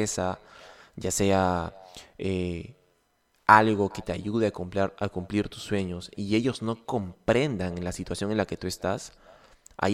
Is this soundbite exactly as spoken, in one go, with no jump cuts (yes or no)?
yes